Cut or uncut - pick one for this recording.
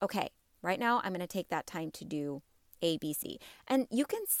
cut